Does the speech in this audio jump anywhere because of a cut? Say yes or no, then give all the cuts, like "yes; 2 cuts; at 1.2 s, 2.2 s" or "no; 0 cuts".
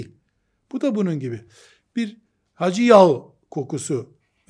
no; 0 cuts